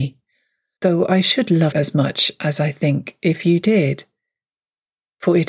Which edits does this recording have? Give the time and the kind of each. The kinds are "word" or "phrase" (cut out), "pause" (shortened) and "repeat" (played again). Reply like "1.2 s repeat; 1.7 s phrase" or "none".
1.7 s word